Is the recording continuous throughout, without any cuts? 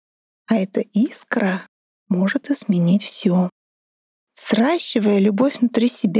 yes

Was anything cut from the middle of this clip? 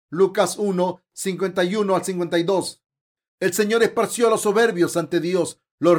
no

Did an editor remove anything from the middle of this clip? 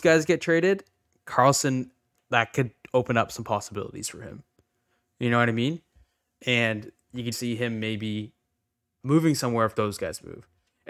yes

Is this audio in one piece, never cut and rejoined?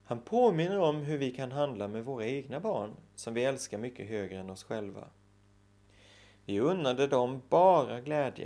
yes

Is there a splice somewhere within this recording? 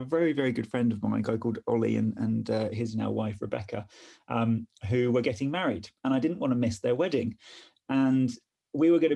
no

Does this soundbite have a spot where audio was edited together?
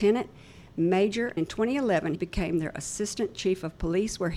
yes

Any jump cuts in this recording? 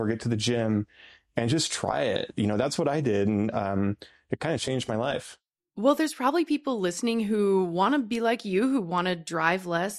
no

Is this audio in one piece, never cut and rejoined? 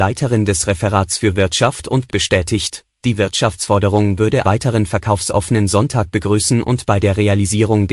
no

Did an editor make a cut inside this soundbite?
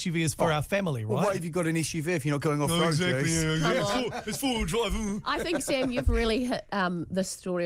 no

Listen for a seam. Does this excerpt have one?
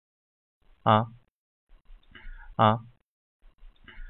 yes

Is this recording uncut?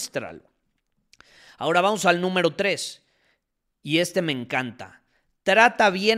yes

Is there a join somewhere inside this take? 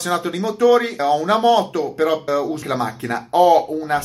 yes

